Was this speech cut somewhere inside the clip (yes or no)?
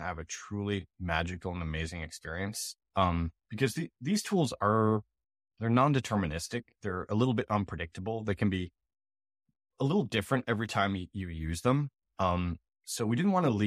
yes